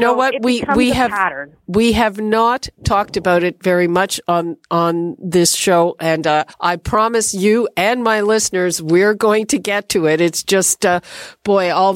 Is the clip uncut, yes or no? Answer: no